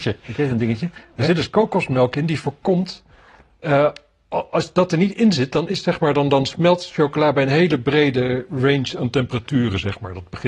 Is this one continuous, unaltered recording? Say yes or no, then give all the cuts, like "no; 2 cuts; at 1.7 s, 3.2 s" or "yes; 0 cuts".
yes; 0 cuts